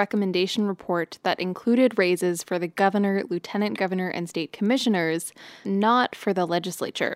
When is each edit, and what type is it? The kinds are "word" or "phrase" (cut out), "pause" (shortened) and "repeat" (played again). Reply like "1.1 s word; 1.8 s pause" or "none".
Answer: 5.6 s word